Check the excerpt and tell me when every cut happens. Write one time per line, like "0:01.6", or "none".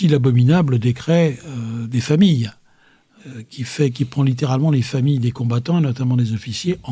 none